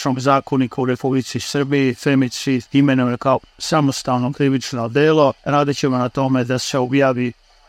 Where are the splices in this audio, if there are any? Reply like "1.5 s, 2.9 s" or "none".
2.7 s, 5.4 s